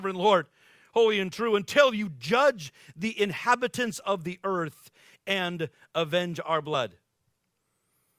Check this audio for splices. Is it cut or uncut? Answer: uncut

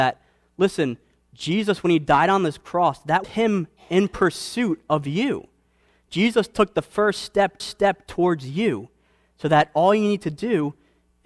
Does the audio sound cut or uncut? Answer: cut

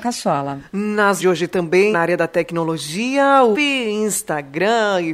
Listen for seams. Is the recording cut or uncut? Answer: cut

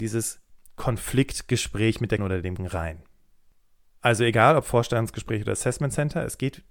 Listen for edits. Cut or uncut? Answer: cut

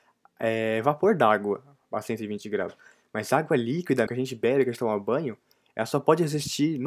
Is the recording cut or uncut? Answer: cut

